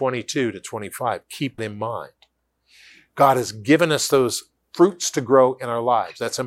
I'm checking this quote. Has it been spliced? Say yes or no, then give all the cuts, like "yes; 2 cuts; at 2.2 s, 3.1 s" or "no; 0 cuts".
yes; 1 cut; at 1.6 s